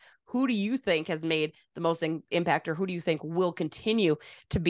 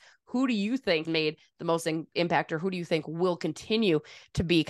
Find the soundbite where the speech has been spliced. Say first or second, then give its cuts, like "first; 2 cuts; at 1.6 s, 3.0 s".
second; 1 cut; at 1.0 s